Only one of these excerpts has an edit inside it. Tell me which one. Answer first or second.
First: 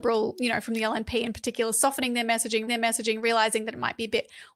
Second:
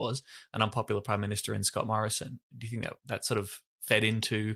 first